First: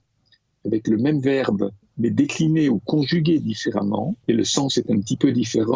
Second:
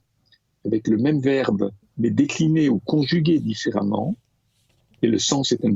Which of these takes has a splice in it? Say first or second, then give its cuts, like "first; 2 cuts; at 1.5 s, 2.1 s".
first; 1 cut; at 4.2 s